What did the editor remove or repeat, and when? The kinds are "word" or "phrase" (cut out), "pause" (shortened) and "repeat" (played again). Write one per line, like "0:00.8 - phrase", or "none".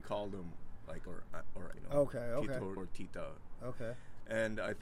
0:01.1 - word
0:01.7 - word
0:02.8 - word